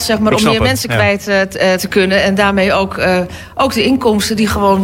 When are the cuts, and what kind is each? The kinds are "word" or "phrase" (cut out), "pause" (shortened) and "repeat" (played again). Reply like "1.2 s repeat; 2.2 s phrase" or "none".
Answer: 1.8 s word